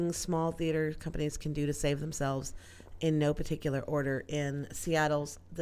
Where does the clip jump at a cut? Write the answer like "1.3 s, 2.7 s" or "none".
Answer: none